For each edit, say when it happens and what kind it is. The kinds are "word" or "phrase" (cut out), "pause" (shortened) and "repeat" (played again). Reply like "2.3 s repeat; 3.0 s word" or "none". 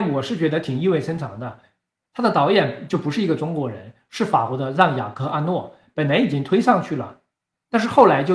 none